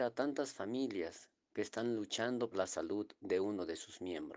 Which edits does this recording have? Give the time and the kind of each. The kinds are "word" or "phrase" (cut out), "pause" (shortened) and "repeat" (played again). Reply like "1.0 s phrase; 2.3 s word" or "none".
2.5 s phrase